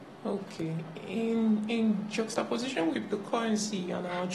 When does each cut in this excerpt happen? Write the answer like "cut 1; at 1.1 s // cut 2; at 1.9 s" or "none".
cut 1; at 2.9 s